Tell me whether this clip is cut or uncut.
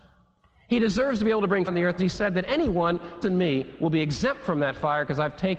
cut